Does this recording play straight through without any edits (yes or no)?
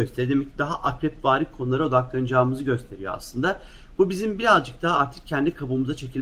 yes